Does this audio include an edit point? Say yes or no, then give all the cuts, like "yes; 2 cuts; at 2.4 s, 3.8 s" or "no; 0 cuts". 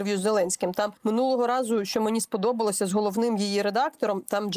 yes; 1 cut; at 1.0 s